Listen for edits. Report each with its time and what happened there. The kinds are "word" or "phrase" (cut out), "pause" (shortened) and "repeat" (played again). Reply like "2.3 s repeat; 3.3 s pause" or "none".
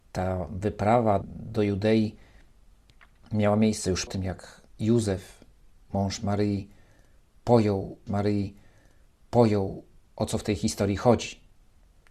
1.2 s word; 4.1 s word; 4.7 s pause; 8.1 s repeat